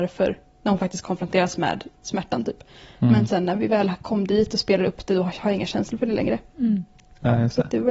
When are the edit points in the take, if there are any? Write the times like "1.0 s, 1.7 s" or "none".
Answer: none